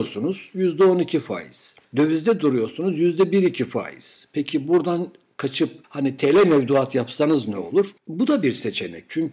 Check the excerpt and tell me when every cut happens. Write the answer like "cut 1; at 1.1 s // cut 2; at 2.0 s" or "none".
cut 1; at 5.8 s // cut 2; at 8.0 s